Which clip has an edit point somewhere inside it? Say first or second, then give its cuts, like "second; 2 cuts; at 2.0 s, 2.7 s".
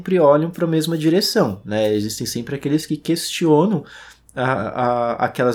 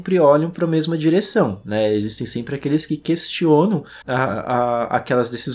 second; 1 cut; at 4.0 s